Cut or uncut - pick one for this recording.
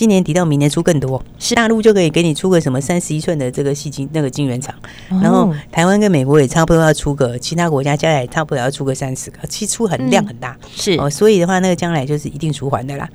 cut